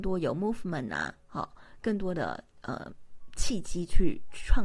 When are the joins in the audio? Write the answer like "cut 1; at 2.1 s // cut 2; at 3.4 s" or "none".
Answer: none